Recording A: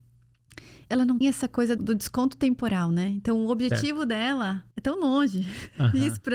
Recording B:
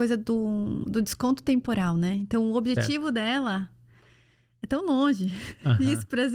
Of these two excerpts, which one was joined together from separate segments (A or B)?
A